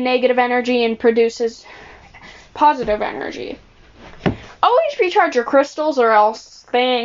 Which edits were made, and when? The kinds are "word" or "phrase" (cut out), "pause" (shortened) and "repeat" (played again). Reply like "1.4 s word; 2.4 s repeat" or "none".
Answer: none